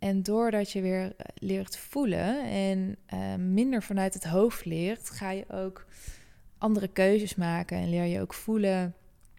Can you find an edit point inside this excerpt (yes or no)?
yes